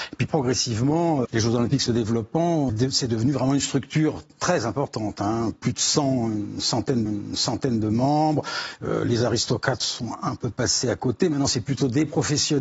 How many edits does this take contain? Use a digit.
3